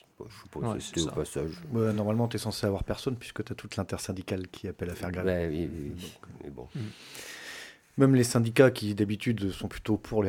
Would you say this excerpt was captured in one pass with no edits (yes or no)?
yes